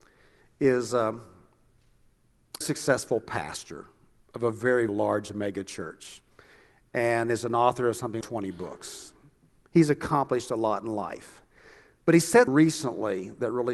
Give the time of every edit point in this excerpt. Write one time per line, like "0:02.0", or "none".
0:02.6
0:04.9
0:08.2
0:12.5